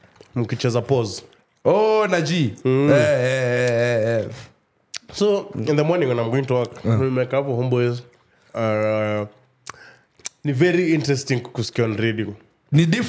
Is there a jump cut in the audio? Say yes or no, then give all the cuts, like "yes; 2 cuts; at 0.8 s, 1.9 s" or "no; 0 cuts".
no; 0 cuts